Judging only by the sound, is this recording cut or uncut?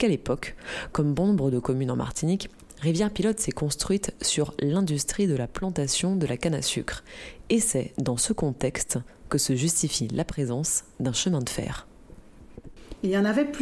uncut